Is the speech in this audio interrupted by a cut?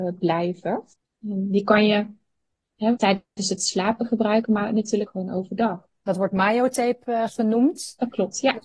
yes; 3 cuts; at 0.9 s, 3.0 s, 5.1 s

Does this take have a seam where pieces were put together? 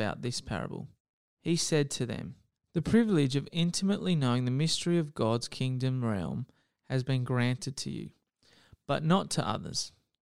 no; 0 cuts

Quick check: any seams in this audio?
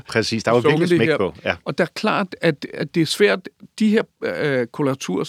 no; 0 cuts

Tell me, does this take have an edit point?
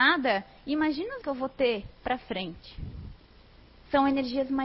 yes; 2 cuts; at 1.2 s, 1.9 s

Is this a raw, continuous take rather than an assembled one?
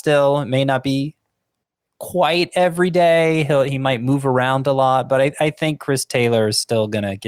yes; 0 cuts

